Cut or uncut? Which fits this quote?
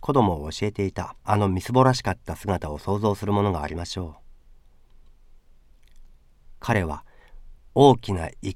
cut